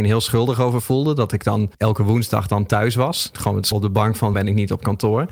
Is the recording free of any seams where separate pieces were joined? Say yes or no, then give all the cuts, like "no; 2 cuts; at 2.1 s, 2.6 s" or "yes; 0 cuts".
no; 4 cuts; at 1.7 s, 3.3 s, 3.7 s, 4.3 s